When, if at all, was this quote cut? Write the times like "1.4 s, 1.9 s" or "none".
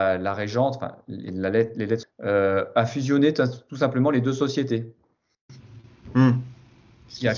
2.0 s